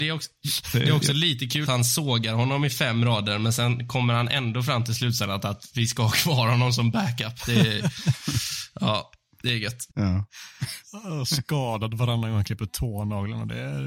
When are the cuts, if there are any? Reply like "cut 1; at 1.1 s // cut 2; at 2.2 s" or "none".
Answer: cut 1; at 1.7 s // cut 2; at 9.9 s